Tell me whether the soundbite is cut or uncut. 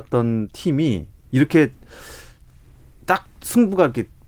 uncut